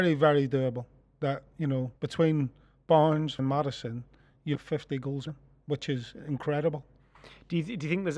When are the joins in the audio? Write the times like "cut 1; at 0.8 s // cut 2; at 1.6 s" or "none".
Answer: cut 1; at 2.0 s // cut 2; at 3.4 s // cut 3; at 4.5 s // cut 4; at 5.3 s